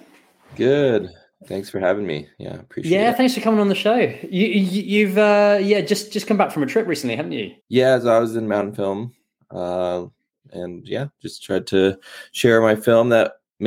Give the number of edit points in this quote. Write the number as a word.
one